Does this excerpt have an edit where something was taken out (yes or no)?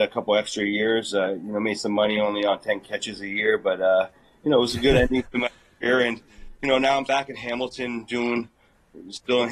yes